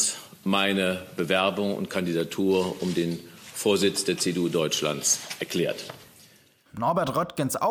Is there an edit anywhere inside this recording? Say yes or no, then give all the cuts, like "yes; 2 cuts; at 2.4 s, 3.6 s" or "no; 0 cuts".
no; 0 cuts